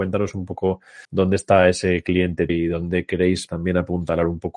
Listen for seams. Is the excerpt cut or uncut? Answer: cut